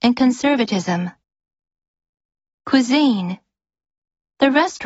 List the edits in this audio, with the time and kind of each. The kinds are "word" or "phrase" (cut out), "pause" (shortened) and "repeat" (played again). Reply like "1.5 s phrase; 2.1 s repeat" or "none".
none